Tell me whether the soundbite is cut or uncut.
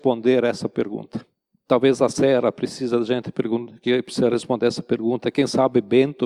uncut